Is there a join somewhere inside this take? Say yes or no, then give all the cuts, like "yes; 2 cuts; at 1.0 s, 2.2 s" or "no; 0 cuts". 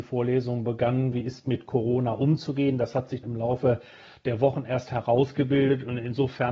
yes; 2 cuts; at 1.1 s, 3.2 s